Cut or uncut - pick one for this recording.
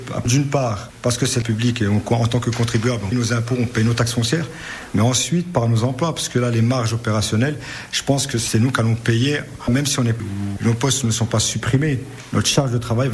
cut